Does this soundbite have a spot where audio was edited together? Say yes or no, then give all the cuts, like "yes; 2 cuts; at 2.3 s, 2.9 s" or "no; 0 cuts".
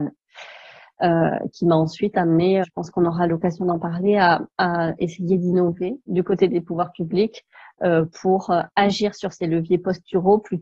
yes; 1 cut; at 2.6 s